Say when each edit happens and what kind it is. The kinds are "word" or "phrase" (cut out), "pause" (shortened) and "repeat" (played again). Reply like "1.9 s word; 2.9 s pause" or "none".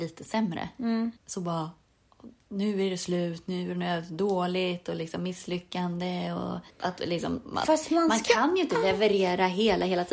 1.2 s pause; 6.7 s pause